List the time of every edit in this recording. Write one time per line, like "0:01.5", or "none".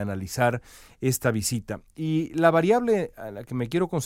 none